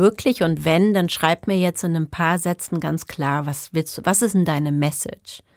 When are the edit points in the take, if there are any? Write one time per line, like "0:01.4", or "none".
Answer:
none